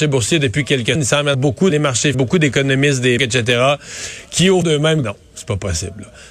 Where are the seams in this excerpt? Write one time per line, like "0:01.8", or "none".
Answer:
0:00.9
0:01.3
0:01.7
0:02.1
0:03.2
0:04.6
0:05.0